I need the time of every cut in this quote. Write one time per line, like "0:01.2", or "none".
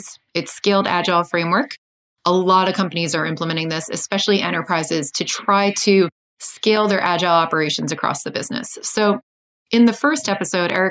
none